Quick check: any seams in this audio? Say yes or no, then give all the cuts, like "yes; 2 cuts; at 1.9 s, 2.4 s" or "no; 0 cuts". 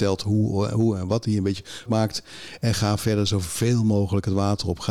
yes; 1 cut; at 1.9 s